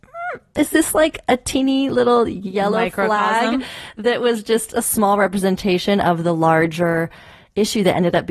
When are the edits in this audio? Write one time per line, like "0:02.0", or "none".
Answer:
none

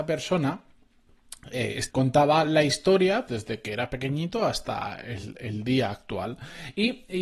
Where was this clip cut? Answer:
0:01.9
0:03.3

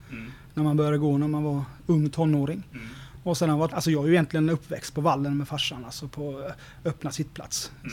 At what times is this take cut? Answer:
0:01.8
0:03.7

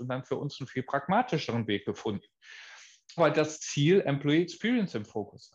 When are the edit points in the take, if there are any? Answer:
0:03.2

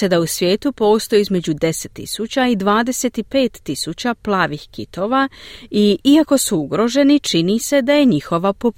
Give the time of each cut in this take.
none

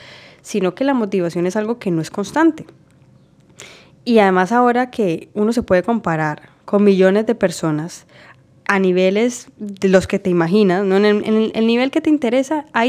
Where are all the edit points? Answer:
none

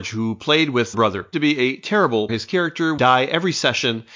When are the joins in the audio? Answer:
0:00.9
0:01.3
0:02.3
0:03.0

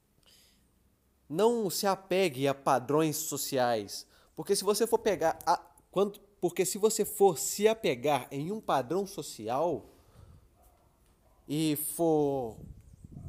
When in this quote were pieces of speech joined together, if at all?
none

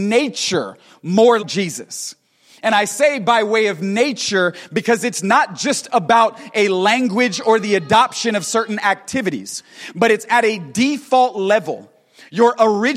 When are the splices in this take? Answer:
0:01.4

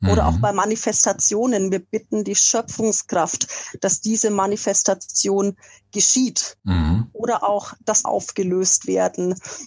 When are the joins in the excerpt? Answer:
0:06.6
0:08.0

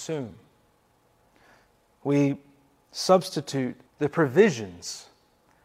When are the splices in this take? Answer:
0:03.9

